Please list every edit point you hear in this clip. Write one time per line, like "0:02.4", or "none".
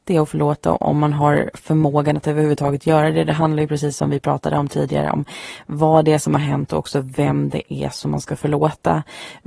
none